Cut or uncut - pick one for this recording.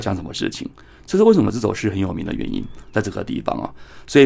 uncut